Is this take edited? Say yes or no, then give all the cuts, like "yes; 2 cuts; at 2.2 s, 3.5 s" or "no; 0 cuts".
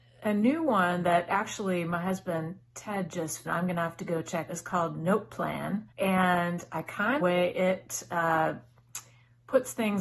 yes; 4 cuts; at 3.5 s, 4.5 s, 5.9 s, 7.2 s